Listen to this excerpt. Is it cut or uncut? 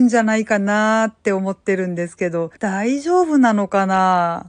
cut